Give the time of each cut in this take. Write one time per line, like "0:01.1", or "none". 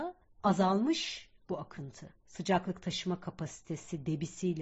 0:02.2

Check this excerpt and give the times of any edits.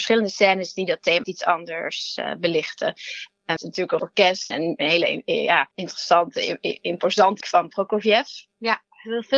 0:01.2
0:03.6
0:04.0
0:04.5
0:07.4

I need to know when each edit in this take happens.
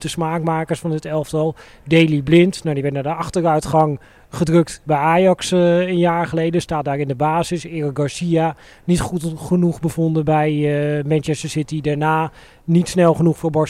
none

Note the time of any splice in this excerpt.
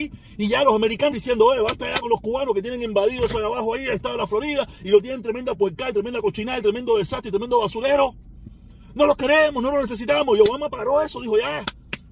0:01.1

